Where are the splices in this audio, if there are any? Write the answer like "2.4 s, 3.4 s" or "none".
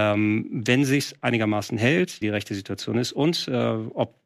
2.2 s

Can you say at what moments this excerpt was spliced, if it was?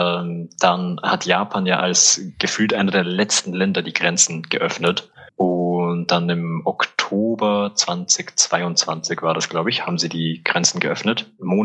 5.3 s

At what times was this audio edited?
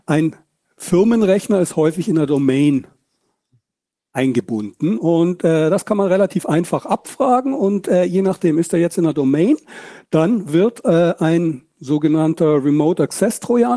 none

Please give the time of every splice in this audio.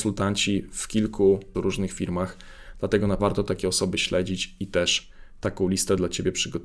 1.5 s, 3.2 s

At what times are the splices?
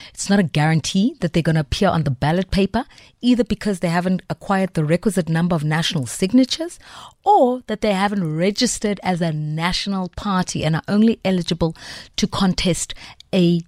none

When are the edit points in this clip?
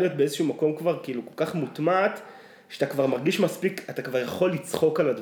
none

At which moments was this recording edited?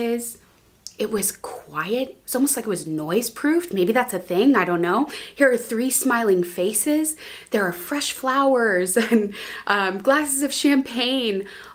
none

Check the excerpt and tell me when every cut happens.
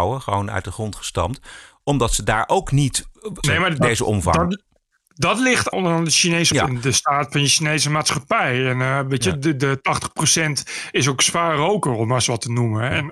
3.4 s, 5.7 s, 6.5 s

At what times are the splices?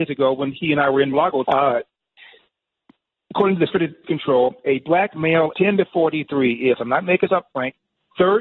1.1 s, 1.4 s, 3.7 s, 4.0 s, 5.5 s, 7.3 s

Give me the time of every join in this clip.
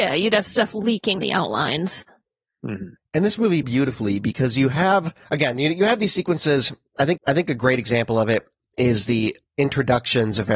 1.2 s, 3.0 s, 3.6 s, 5.2 s, 7.2 s

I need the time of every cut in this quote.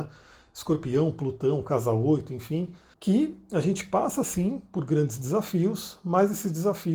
2.9 s

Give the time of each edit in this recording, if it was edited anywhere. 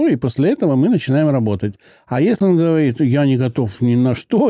none

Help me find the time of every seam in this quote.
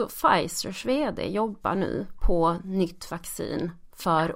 none

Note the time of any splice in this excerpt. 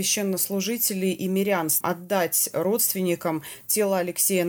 1.8 s

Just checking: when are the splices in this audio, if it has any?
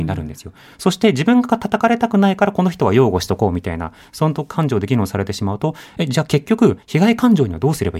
6.8 s

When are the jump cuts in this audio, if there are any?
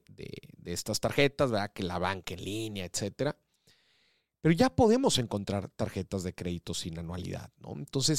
none

